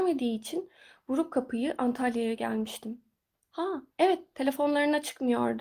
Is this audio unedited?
no; 1 cut; at 3.9 s

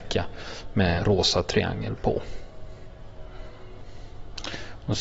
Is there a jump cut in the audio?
yes; 1 cut; at 1.0 s

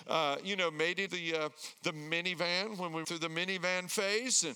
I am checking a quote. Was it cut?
yes; 2 cuts; at 1.1 s, 3.0 s

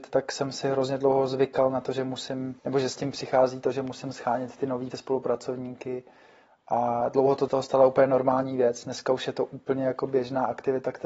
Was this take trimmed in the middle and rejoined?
yes; 3 cuts; at 2.6 s, 4.9 s, 7.5 s

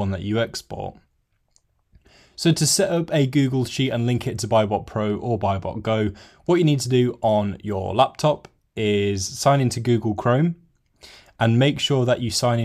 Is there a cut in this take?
no; 0 cuts

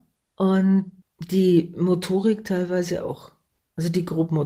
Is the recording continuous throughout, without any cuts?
yes; 0 cuts

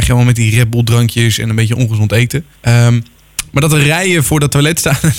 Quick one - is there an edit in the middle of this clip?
yes; 1 cut; at 2.5 s

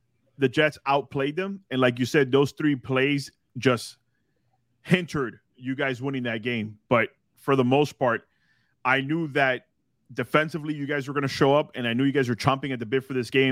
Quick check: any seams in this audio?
no; 0 cuts

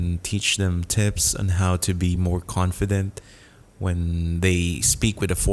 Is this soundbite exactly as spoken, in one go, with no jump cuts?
yes; 0 cuts

